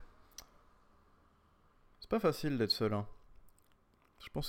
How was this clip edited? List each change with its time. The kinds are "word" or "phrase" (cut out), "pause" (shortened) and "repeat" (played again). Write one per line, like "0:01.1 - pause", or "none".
none

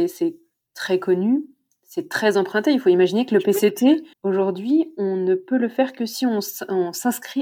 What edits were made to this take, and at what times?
0:04.1 - pause

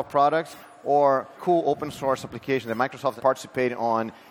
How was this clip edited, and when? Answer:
0:01.3 - word
0:03.2 - word

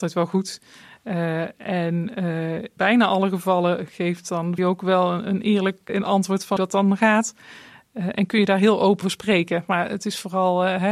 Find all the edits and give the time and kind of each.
0:02.8 - word
0:04.6 - word
0:05.9 - word
0:06.6 - word
0:09.0 - word

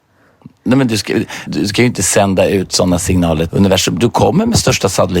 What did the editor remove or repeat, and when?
0:01.5 - word
0:03.5 - word

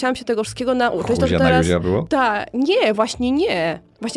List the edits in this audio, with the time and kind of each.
none

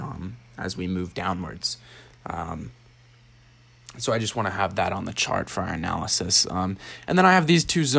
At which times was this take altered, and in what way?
none

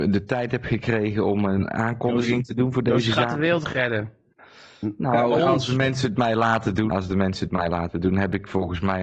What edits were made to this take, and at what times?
0:05.4 - word
0:06.9 - word

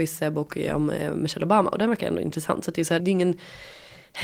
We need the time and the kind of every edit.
0:03.0 - word

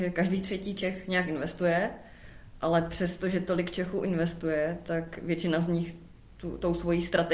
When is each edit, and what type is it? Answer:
none

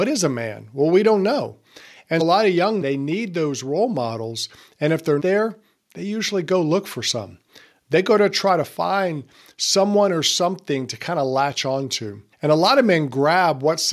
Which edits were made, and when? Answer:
0:02.2 - word
0:02.8 - word
0:05.2 - word
0:12.3 - pause

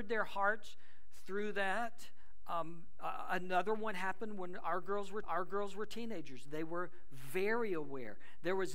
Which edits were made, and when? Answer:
0:05.2 - repeat

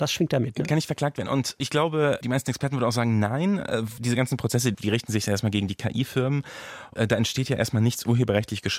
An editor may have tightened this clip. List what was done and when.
0:04.0 - word
0:04.7 - word

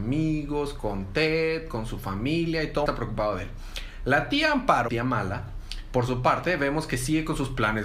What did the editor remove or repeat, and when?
0:02.9 - phrase
0:04.9 - word

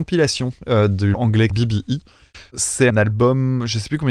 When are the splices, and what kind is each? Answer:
0:01.1 - word
0:01.5 - word
0:02.9 - word

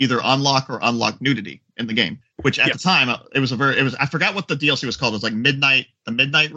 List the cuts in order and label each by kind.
none

